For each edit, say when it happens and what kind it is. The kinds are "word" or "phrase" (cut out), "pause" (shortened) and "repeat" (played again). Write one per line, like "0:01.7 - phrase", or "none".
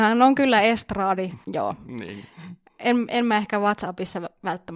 none